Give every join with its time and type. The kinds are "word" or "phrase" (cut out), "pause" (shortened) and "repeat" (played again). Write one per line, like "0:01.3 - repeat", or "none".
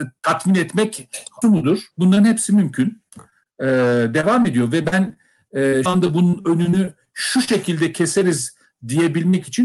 0:01.4 - word
0:01.9 - pause
0:05.9 - word